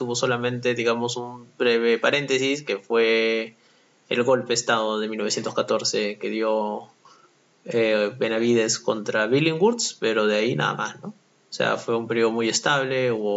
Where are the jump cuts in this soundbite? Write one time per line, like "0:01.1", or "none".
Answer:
none